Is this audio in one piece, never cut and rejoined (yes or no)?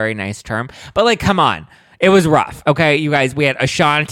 yes